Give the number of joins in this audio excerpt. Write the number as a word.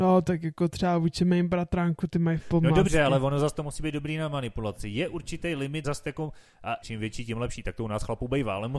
three